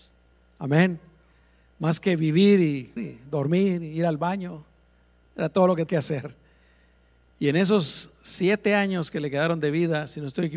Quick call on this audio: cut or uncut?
cut